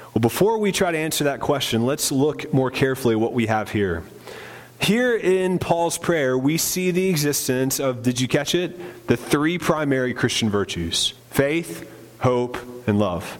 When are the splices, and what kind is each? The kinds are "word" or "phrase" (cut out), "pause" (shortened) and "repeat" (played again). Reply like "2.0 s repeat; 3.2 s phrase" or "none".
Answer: 4.7 s pause; 11.2 s pause

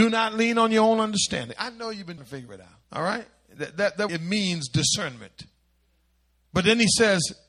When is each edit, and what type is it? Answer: 2.2 s word; 2.8 s pause; 4.1 s phrase

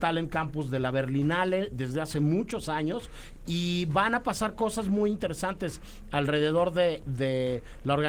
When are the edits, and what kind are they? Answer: none

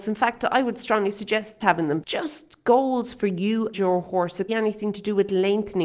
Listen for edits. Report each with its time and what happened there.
1.6 s word; 2.0 s phrase; 3.7 s word; 4.5 s phrase

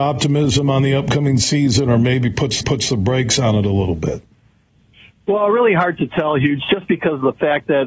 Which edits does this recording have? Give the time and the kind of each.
2.6 s repeat

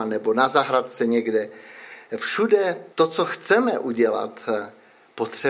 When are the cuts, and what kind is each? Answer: 2.9 s pause

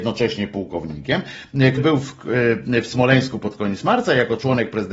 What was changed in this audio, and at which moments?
1.8 s word

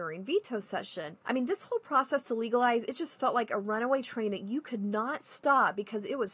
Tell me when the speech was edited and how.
1.2 s pause

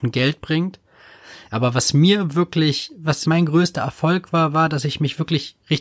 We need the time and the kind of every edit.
3.2 s phrase

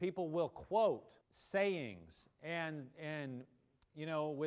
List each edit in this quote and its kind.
1.2 s pause

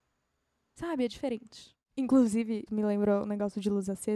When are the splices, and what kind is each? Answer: 2.7 s word

